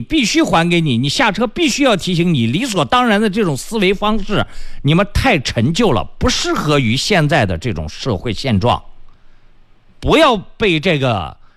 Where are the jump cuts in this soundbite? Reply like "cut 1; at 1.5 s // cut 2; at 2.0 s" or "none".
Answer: none